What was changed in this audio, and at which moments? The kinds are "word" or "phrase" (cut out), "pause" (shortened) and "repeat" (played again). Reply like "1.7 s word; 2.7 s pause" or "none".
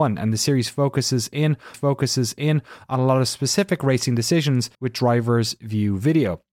1.7 s repeat; 4.7 s pause